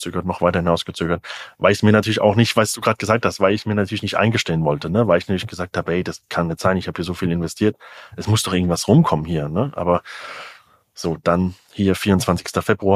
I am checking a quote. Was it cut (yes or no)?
no